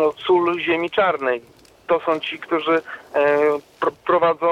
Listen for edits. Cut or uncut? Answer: uncut